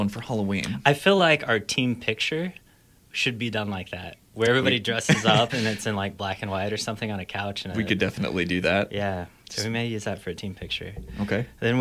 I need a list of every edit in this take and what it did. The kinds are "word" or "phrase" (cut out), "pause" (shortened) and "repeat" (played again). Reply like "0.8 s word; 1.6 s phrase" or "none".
none